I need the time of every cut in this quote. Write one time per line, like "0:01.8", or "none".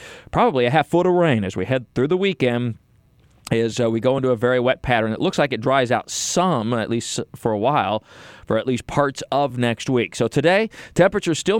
none